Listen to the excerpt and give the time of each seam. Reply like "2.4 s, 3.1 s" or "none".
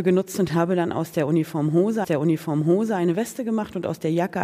2.0 s